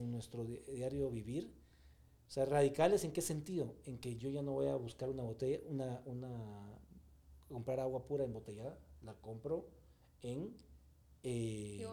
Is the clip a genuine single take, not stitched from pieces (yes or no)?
yes